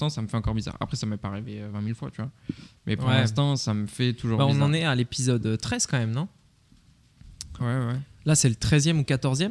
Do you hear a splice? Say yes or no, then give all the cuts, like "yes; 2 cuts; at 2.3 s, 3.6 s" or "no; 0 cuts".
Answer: yes; 1 cut; at 7.6 s